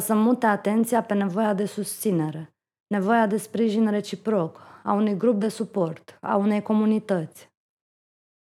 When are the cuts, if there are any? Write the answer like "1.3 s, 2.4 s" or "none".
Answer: none